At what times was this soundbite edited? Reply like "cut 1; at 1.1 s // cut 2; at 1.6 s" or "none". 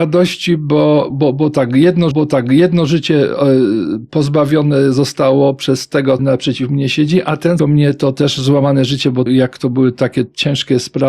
cut 1; at 1.1 s // cut 2; at 2.1 s // cut 3; at 6.2 s // cut 4; at 7.6 s // cut 5; at 9.3 s

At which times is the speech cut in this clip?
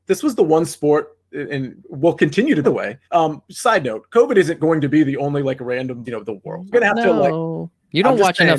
cut 1; at 2.6 s // cut 2; at 3.0 s // cut 3; at 6.0 s // cut 4; at 6.7 s

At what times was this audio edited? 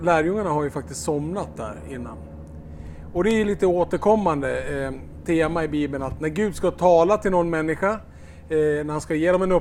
none

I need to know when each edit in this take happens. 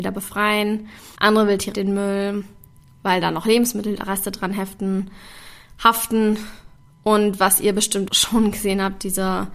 cut 1; at 1.2 s // cut 2; at 1.7 s // cut 3; at 8.1 s

